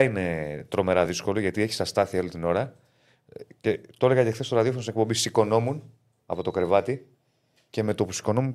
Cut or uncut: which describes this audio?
uncut